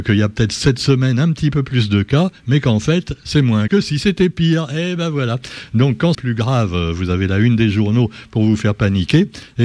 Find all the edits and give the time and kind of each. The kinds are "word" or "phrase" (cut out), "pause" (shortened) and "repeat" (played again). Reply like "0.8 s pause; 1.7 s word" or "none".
3.7 s word; 6.1 s word